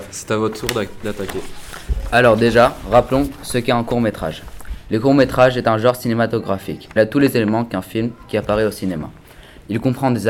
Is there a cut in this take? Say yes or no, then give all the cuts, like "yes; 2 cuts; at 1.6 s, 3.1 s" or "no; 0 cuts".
yes; 1 cut; at 7.0 s